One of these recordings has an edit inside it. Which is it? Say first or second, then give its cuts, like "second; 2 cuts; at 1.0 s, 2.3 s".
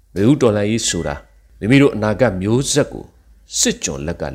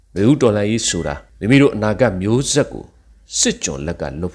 second; 1 cut; at 1.3 s